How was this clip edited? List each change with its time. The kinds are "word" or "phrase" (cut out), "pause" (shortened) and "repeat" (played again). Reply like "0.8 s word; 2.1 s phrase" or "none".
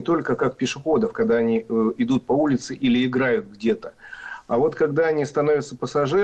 none